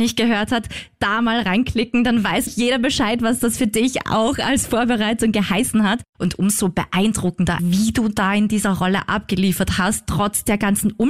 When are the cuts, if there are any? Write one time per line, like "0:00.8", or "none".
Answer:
0:02.5
0:07.6